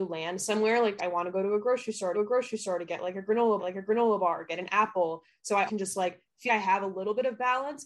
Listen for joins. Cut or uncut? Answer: cut